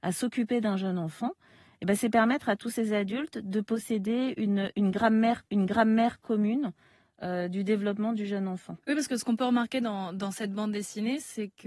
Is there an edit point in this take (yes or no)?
yes